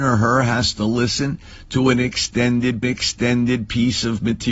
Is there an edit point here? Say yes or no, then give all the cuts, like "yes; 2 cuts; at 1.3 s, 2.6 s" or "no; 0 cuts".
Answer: yes; 1 cut; at 2.8 s